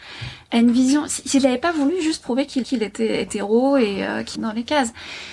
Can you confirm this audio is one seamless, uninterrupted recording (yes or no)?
no